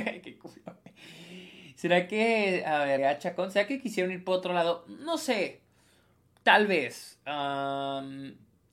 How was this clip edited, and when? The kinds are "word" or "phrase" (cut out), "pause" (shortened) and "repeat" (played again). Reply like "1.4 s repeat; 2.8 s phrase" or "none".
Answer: 3.0 s word